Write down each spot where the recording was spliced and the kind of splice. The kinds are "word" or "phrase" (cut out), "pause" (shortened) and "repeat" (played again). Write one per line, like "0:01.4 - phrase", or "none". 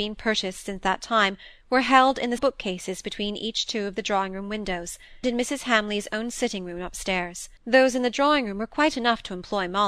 0:02.4 - word
0:05.2 - word
0:07.6 - pause